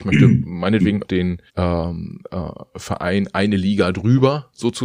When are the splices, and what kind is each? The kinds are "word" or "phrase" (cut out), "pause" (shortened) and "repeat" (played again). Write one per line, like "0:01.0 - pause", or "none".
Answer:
0:01.0 - word
0:01.5 - pause